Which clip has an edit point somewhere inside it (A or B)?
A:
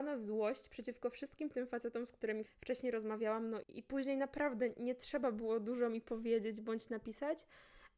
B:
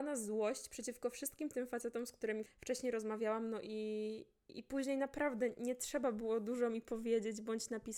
A